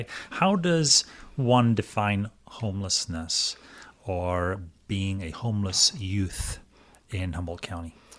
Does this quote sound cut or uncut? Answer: uncut